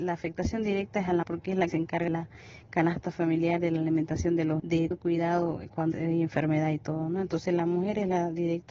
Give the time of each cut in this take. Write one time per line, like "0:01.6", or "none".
0:01.2
0:01.7
0:02.1
0:04.6
0:04.9
0:05.9

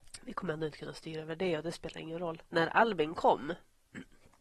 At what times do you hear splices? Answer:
0:02.5

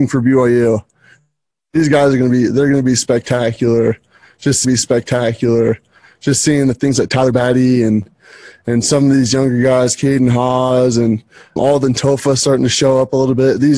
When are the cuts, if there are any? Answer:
0:04.6
0:11.6

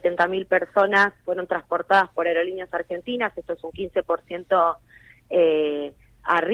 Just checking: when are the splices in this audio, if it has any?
none

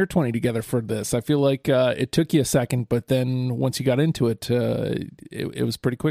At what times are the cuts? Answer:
none

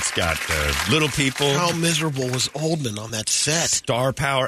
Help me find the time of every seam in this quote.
none

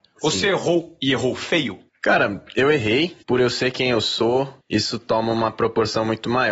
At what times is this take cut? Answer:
0:01.9
0:03.2
0:04.6

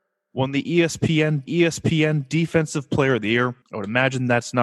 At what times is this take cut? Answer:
0:01.5
0:03.6

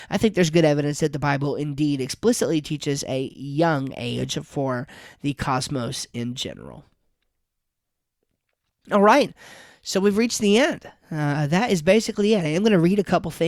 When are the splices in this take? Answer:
none

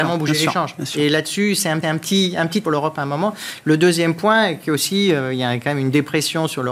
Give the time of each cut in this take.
0:01.8
0:02.6

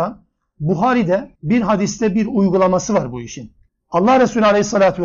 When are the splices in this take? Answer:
0:01.4

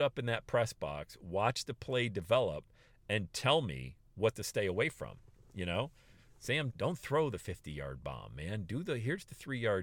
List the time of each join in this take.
0:06.7

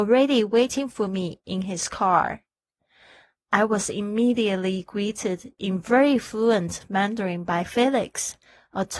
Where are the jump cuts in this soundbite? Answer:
none

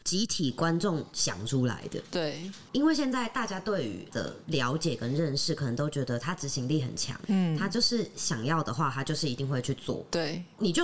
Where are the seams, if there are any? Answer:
0:04.1

